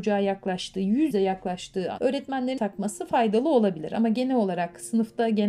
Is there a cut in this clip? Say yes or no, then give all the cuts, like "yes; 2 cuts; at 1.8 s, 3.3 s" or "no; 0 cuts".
yes; 3 cuts; at 1.1 s, 2.0 s, 2.6 s